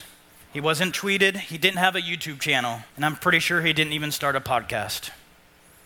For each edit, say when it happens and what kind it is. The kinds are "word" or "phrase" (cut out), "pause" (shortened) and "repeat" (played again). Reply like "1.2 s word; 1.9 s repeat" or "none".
0.9 s phrase; 1.7 s word; 2.9 s pause